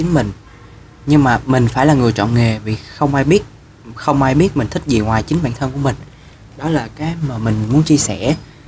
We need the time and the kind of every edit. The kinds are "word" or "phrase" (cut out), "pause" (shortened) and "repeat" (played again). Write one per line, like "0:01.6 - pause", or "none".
none